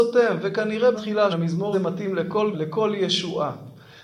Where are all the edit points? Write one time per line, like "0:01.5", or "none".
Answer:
0:00.9
0:01.3
0:01.7
0:02.5